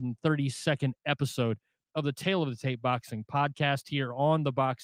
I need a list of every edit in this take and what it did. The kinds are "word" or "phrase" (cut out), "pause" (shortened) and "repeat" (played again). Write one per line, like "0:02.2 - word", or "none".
none